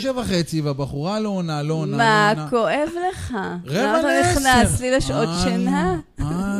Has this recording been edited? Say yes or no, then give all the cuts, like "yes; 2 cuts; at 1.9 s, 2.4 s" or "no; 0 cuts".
no; 0 cuts